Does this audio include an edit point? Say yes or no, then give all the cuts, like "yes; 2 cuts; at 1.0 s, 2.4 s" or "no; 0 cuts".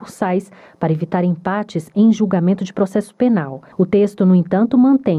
yes; 1 cut; at 3.7 s